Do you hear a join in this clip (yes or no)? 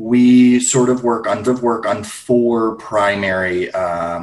yes